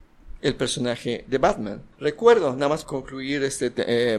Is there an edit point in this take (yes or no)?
yes